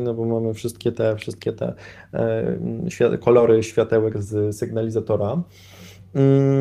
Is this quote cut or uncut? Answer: uncut